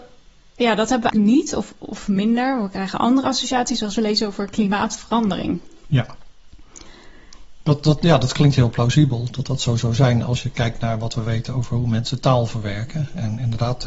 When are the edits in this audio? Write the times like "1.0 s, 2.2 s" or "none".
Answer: 1.1 s